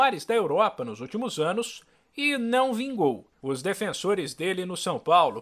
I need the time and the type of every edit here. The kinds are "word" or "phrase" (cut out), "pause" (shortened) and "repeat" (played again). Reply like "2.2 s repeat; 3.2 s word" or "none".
3.3 s pause